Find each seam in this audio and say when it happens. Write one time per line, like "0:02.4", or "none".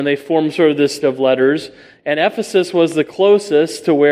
0:01.0